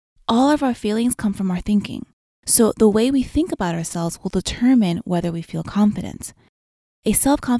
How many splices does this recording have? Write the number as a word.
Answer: zero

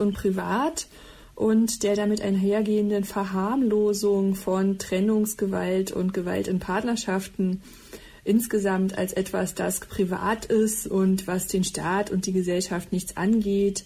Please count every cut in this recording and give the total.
zero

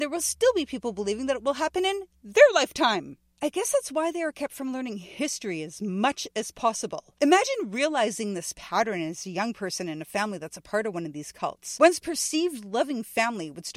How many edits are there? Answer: zero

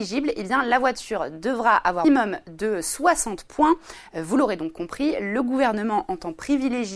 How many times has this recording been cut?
one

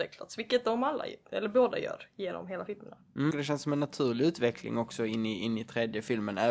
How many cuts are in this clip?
one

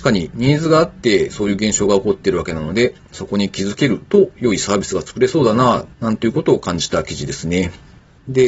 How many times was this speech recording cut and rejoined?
one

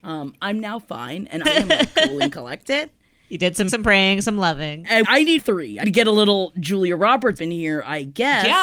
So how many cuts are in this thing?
six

